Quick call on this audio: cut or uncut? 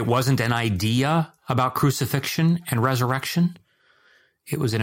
uncut